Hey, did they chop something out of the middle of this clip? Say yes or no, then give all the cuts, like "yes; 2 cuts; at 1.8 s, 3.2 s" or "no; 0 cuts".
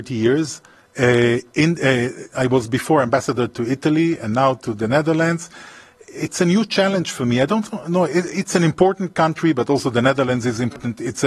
no; 0 cuts